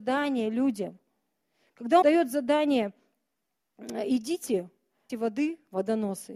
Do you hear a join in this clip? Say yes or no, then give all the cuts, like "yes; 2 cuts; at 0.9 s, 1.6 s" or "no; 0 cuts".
yes; 2 cuts; at 2.0 s, 5.1 s